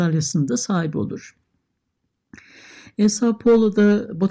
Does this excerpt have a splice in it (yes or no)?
no